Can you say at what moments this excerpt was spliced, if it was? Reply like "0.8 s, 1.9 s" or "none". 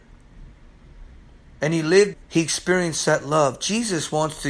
2.1 s

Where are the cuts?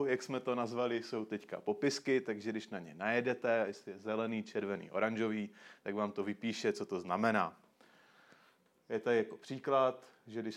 none

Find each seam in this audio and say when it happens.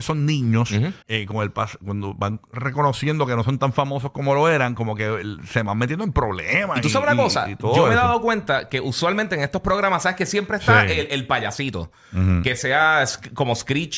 1.0 s

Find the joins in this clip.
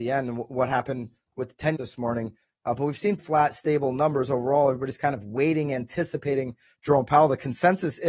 1.8 s, 3.2 s

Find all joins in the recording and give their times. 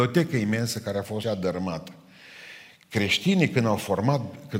1.2 s

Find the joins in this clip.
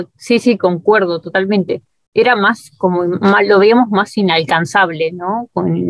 none

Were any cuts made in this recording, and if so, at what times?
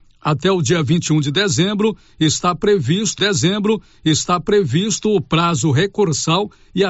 3.2 s

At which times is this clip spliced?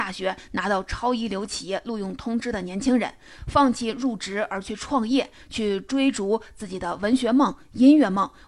none

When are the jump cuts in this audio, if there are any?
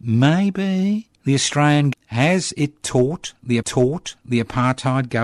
1.2 s, 1.9 s, 3.6 s

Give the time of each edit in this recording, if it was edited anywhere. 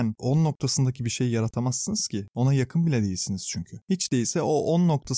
none

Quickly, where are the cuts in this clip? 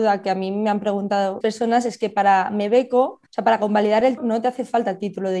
1.4 s, 3.3 s, 4.2 s

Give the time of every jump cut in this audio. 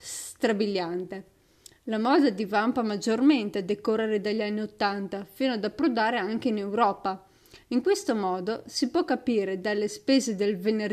none

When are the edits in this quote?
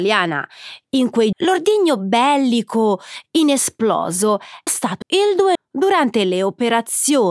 1.3 s, 4.7 s, 5.0 s, 5.5 s

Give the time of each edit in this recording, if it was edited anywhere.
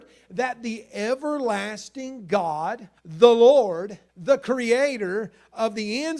3.0 s, 4.1 s

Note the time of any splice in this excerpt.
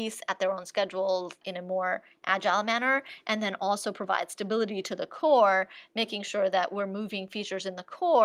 none

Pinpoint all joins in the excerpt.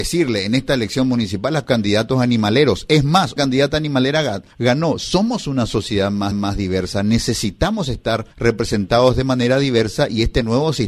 1.7 s, 3.4 s, 4.5 s, 6.3 s, 8.3 s

